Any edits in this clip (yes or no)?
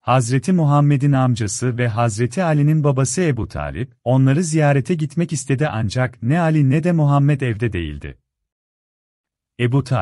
no